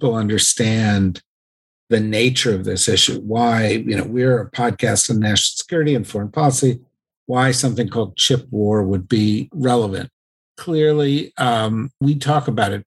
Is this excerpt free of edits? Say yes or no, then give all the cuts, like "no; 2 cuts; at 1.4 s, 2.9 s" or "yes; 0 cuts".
yes; 0 cuts